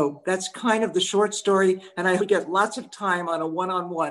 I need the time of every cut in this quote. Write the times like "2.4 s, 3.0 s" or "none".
2.2 s